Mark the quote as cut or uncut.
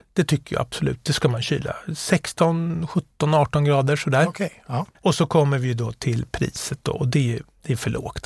cut